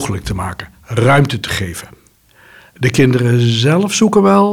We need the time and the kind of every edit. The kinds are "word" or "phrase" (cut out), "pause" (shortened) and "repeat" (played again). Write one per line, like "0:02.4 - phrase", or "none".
none